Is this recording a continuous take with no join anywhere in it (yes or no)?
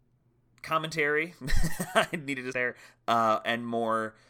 no